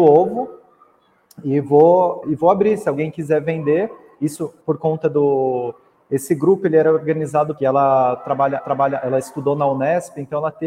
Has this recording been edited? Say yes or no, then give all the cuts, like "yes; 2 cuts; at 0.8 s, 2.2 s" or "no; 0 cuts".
yes; 4 cuts; at 2.2 s, 4.6 s, 7.6 s, 8.6 s